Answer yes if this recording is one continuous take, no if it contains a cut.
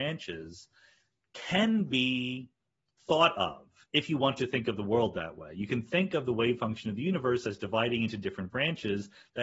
yes